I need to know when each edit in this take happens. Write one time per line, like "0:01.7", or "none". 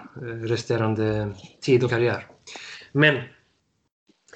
0:01.9